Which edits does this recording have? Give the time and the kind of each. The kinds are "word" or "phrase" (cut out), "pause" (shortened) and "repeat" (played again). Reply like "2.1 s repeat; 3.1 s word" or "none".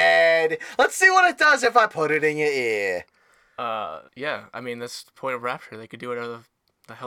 4.1 s pause